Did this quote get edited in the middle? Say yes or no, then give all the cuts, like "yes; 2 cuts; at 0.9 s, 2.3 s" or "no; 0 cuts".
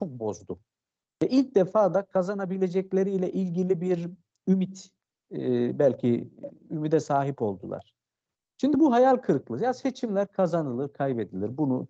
no; 0 cuts